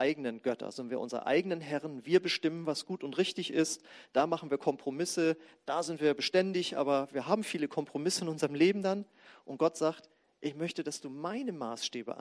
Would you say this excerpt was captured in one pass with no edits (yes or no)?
yes